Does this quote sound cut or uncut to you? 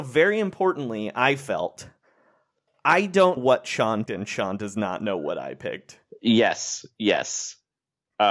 cut